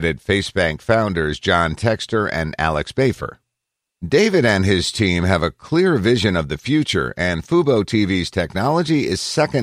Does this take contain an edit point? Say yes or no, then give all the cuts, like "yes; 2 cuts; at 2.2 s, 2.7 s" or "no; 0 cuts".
no; 0 cuts